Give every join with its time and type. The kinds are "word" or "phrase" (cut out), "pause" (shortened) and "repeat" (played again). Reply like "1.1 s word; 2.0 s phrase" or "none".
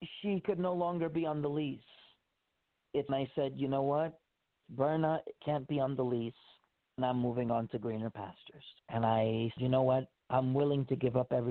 3.1 s word; 4.6 s word; 7.0 s word; 8.8 s pause; 9.6 s word